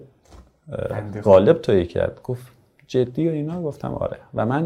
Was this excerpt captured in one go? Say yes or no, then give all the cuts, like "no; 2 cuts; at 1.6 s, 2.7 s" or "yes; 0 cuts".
yes; 0 cuts